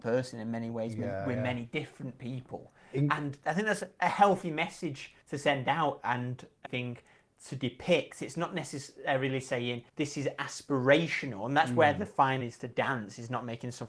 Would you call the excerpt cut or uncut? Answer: cut